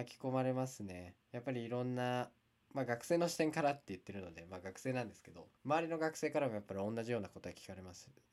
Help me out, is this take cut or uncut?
cut